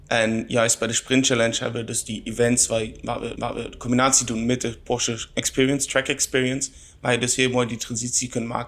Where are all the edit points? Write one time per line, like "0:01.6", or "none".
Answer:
0:03.4